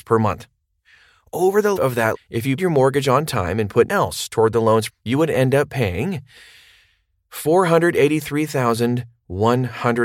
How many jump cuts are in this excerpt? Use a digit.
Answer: 5